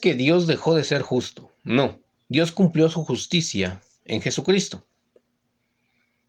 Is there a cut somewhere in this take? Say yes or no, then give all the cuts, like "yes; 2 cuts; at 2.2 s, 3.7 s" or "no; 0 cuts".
yes; 1 cut; at 2.2 s